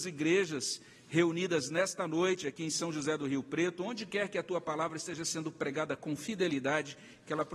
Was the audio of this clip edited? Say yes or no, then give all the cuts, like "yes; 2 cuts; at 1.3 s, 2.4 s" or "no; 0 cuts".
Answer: no; 0 cuts